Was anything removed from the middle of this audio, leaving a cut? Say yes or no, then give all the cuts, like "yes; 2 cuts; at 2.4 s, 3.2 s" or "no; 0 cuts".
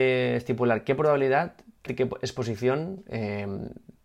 yes; 1 cut; at 1.9 s